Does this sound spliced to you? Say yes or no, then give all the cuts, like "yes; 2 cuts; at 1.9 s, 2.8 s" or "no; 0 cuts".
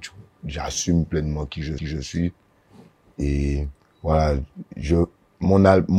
yes; 2 cuts; at 1.8 s, 3.8 s